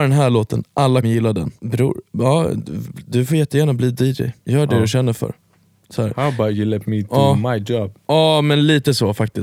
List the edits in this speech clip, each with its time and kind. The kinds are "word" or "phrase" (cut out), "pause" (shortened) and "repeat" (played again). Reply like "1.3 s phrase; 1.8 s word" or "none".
1.0 s word; 1.6 s pause; 4.4 s pause